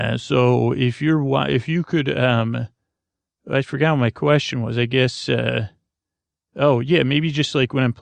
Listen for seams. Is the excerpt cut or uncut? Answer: uncut